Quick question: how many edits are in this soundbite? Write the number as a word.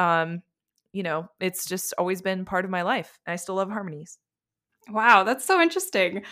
zero